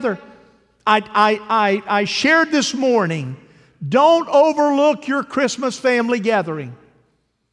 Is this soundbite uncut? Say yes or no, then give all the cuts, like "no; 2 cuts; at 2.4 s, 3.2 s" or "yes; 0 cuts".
yes; 0 cuts